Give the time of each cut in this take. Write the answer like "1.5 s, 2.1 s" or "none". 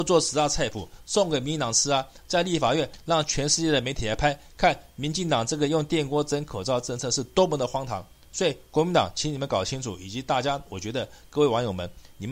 none